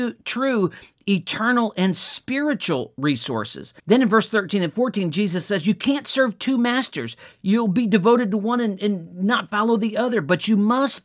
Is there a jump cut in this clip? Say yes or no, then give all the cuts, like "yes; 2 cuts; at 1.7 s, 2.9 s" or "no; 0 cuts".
yes; 1 cut; at 3.8 s